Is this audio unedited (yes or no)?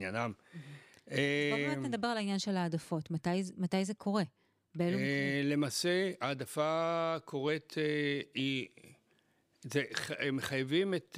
yes